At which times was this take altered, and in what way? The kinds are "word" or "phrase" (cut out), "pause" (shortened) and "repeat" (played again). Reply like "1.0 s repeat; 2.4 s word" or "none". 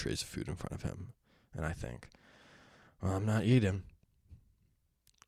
none